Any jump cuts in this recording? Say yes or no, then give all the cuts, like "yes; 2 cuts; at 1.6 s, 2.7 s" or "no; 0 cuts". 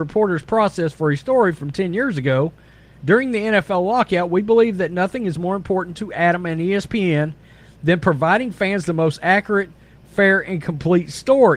no; 0 cuts